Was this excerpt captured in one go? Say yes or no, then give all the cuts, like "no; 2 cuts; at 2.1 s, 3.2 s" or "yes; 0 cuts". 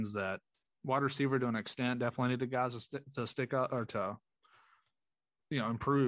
yes; 0 cuts